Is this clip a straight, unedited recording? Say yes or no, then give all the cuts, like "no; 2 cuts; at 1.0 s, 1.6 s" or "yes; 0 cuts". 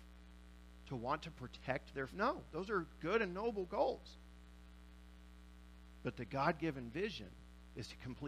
no; 1 cut; at 2.1 s